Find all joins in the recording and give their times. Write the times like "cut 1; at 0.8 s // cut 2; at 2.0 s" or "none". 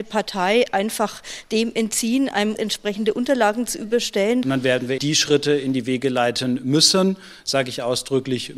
cut 1; at 2.6 s // cut 2; at 5.0 s

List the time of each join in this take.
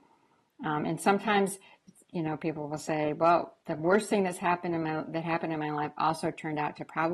cut 1; at 3.6 s

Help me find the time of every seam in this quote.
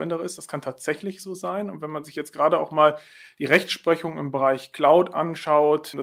none

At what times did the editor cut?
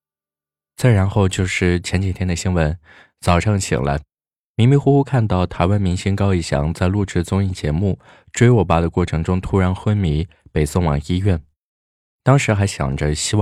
none

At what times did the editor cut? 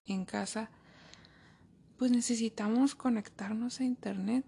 none

